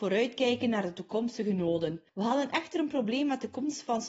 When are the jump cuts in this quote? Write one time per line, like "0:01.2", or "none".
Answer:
none